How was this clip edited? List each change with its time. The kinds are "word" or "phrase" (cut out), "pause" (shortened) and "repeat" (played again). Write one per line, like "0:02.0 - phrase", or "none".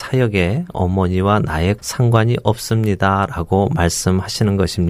0:01.8 - word